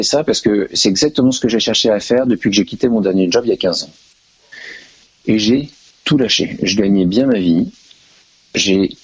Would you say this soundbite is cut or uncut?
uncut